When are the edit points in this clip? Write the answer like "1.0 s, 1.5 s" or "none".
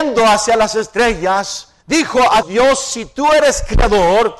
1.8 s, 2.4 s